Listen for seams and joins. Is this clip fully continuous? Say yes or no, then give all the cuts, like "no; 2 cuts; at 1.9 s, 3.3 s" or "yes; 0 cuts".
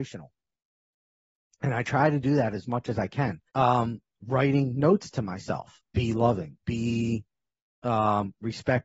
no; 3 cuts; at 3.5 s, 5.9 s, 6.6 s